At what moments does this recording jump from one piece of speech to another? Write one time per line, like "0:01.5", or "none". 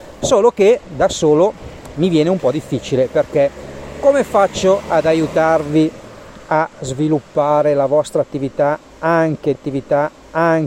0:09.5